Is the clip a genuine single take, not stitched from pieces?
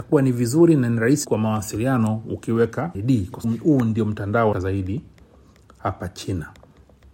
no; 4 cuts; at 1.2 s, 2.9 s, 3.4 s, 4.5 s

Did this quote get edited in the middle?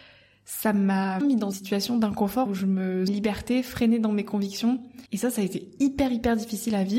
yes; 5 cuts; at 1.2 s, 1.5 s, 2.5 s, 3.1 s, 5.1 s

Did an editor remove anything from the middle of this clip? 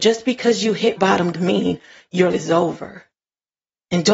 yes; 3 cuts; at 0.9 s, 1.3 s, 2.3 s

